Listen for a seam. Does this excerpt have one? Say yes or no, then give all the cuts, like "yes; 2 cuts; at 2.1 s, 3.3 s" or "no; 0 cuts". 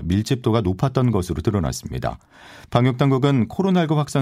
no; 0 cuts